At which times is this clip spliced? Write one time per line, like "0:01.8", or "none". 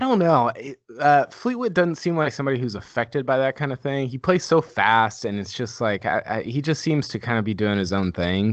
none